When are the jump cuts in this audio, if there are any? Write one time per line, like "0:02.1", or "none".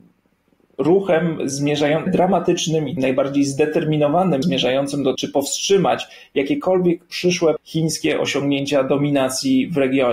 0:02.1
0:03.0
0:04.4
0:05.1
0:07.6